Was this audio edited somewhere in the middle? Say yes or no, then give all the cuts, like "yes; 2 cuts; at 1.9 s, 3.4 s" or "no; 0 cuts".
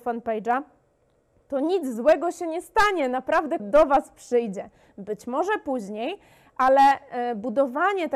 yes; 1 cut; at 3.6 s